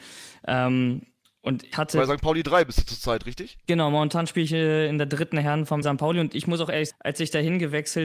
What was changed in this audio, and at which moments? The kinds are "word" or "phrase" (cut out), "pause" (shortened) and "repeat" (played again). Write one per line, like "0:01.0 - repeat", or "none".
0:01.7 - word
0:05.8 - word
0:06.9 - word